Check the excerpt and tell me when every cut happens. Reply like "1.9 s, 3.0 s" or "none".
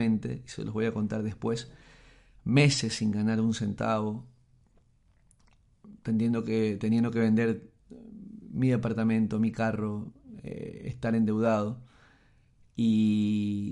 none